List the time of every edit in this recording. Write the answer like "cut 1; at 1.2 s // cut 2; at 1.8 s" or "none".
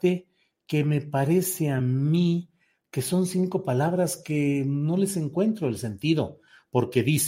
none